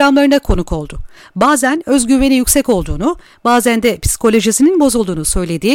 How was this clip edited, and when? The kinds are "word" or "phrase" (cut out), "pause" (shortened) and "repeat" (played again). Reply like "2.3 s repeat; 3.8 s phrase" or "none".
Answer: none